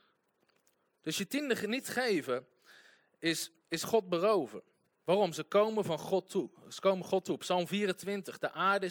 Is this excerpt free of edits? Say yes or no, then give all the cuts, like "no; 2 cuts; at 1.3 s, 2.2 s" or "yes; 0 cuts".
yes; 0 cuts